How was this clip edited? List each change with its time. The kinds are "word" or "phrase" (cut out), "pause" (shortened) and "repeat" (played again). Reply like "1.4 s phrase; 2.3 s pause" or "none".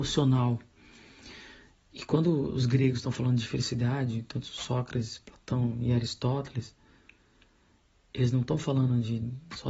none